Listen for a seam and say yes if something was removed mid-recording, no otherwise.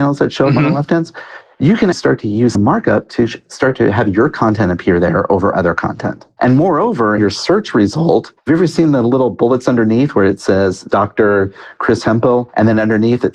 yes